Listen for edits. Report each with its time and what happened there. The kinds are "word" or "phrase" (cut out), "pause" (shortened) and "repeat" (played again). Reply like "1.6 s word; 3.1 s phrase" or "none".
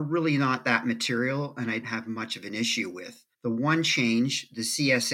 1.8 s word; 3.3 s pause